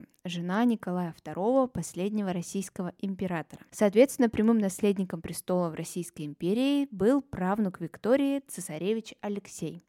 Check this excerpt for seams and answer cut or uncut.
cut